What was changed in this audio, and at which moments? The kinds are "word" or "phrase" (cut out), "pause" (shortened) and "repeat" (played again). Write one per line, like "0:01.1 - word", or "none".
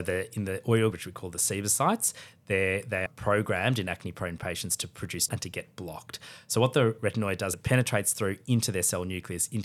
0:00.9 - word
0:03.1 - word
0:05.3 - phrase
0:07.5 - word